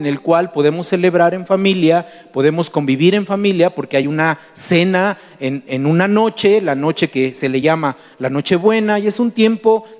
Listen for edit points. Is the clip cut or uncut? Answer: uncut